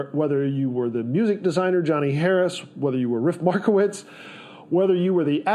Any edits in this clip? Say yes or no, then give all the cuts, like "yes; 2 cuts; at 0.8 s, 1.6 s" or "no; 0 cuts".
no; 0 cuts